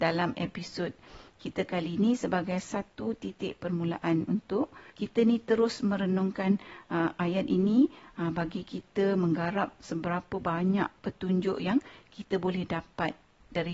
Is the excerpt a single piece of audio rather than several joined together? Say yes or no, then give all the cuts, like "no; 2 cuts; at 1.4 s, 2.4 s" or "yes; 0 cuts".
no; 2 cuts; at 4.9 s, 11.0 s